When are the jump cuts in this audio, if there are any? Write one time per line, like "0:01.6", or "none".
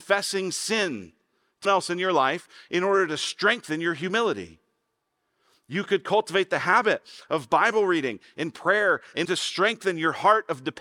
0:01.6
0:09.2